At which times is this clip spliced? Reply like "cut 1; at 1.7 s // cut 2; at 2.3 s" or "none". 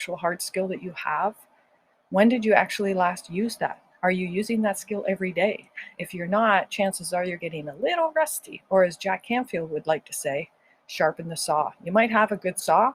none